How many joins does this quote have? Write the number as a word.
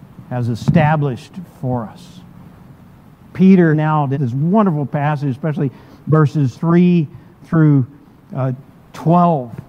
three